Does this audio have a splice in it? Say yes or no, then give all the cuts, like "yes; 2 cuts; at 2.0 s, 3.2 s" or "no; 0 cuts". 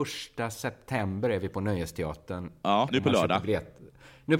yes; 1 cut; at 2.9 s